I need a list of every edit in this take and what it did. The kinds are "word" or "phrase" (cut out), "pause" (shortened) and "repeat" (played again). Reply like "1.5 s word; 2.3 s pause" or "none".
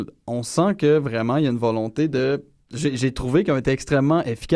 none